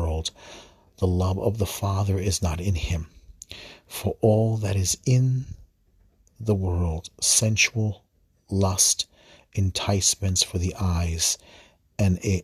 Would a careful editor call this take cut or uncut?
uncut